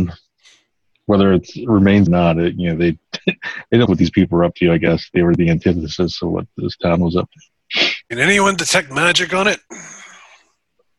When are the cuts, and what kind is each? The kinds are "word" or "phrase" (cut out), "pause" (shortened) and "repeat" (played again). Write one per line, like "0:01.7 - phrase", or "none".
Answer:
0:02.1 - phrase
0:03.9 - word
0:08.0 - pause